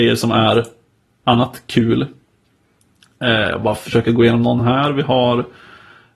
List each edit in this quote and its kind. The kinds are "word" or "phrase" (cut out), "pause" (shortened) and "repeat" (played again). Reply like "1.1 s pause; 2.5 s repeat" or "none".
none